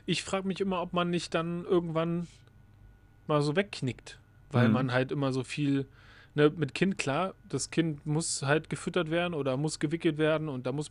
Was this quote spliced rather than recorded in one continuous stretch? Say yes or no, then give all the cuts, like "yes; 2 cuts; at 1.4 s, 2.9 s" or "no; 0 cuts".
no; 0 cuts